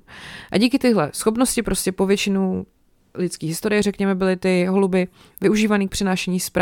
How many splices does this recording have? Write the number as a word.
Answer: zero